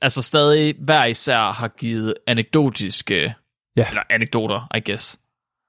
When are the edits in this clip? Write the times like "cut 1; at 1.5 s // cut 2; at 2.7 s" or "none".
none